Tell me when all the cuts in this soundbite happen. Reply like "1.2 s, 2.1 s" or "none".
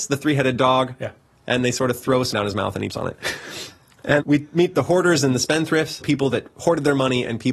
2.3 s, 2.9 s, 4.2 s, 6.0 s